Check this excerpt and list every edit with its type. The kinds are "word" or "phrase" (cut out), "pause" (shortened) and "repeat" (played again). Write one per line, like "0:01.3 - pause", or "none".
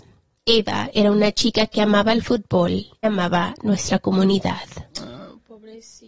0:03.0 - word
0:04.9 - pause

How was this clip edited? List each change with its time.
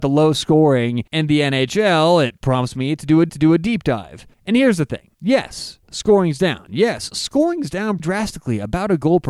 0:01.1 - pause
0:03.3 - repeat
0:04.3 - pause
0:05.1 - pause
0:08.0 - word

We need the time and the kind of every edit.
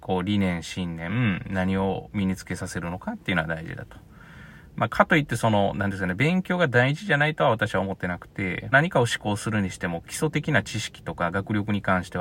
0:08.7 - phrase

